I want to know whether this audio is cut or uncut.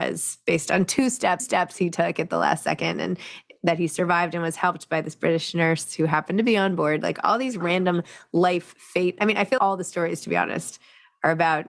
cut